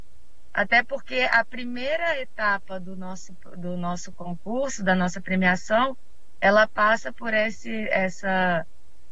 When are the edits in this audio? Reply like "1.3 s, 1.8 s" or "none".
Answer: none